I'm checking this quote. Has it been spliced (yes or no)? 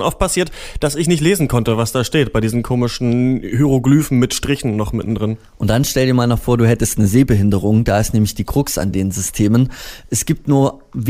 no